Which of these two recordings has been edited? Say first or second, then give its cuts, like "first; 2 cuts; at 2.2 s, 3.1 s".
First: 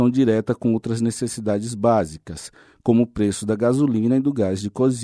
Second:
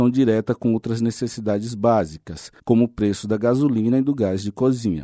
second; 1 cut; at 2.6 s